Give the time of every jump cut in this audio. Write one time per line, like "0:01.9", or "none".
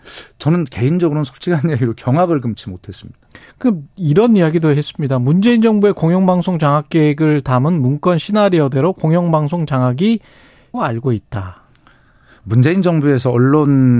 0:10.7